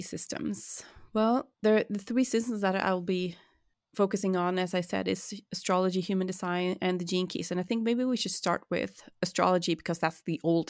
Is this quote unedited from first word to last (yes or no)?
no